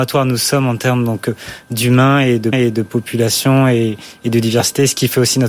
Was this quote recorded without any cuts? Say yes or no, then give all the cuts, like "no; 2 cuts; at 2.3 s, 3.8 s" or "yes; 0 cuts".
no; 1 cut; at 2.5 s